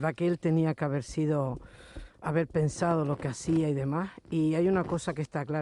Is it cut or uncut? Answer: uncut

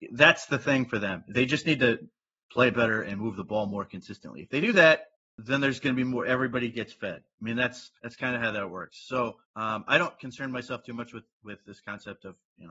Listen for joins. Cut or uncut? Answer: cut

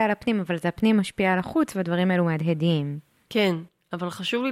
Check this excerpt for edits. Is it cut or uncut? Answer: uncut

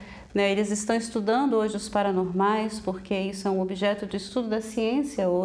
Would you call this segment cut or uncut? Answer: uncut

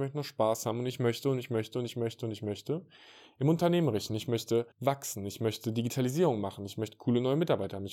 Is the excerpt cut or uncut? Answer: cut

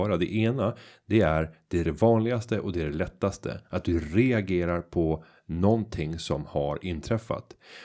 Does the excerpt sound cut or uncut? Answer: cut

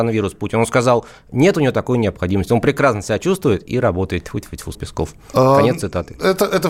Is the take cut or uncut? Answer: cut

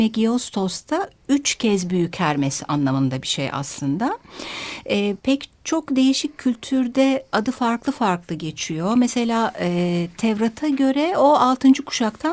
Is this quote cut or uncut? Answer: cut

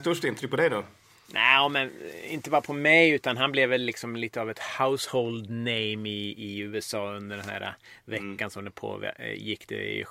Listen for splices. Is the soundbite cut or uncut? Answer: uncut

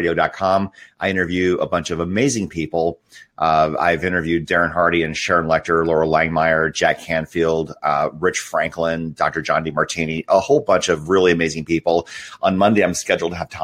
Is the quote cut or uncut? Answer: uncut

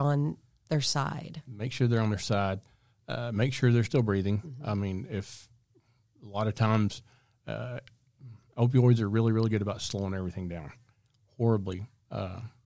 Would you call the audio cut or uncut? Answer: uncut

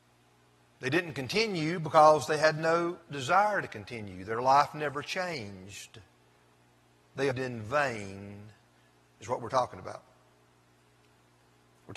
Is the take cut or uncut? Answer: cut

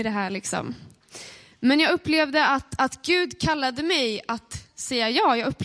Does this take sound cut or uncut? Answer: uncut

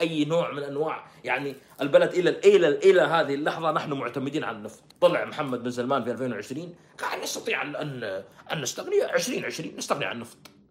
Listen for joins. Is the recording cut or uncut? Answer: cut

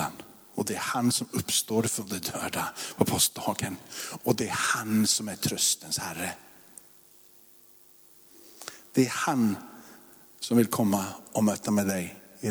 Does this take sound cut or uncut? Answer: uncut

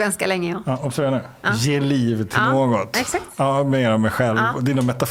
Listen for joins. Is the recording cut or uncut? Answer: uncut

